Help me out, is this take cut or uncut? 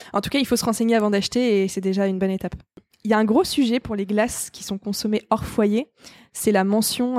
uncut